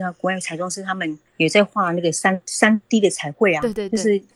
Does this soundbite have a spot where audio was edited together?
yes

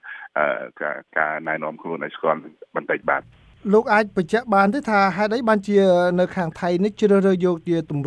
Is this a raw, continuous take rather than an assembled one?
no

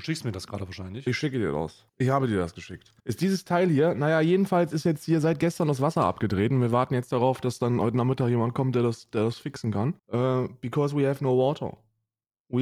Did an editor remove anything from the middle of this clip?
yes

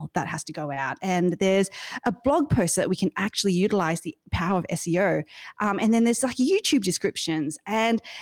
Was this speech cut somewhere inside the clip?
no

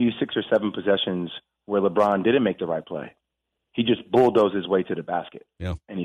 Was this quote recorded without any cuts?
yes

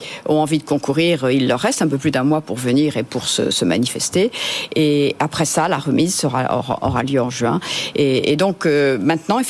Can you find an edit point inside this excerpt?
no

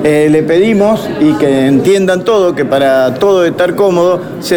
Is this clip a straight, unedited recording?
yes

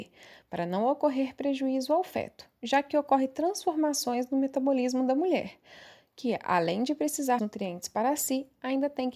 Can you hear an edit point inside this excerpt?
yes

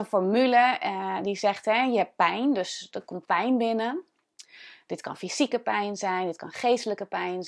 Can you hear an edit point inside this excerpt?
no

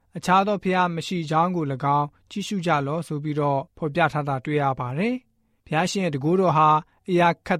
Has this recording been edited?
yes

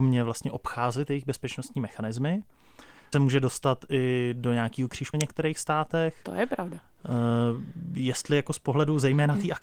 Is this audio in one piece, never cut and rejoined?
no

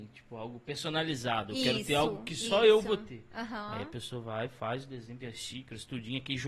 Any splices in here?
yes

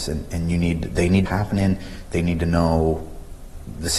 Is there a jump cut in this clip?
yes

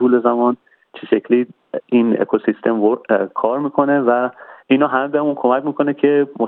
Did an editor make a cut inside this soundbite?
yes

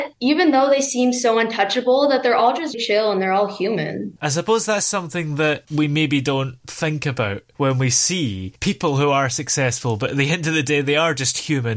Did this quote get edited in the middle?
yes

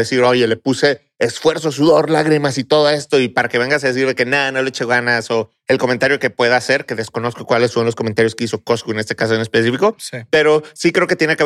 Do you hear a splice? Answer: no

